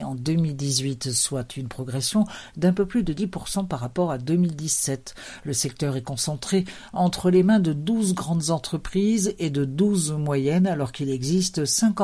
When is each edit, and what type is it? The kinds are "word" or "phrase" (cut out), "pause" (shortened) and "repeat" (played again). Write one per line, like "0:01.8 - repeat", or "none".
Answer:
none